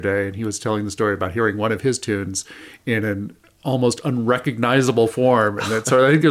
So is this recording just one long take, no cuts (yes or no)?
yes